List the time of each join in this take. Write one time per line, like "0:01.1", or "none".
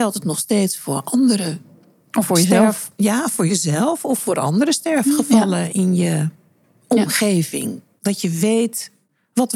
none